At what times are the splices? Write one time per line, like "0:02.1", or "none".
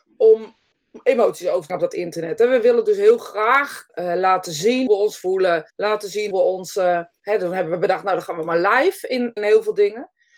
0:01.7
0:03.9
0:04.9
0:05.7
0:06.3
0:09.4